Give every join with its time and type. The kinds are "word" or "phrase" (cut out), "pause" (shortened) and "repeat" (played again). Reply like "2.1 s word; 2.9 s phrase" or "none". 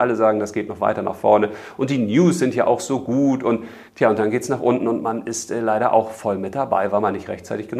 3.9 s pause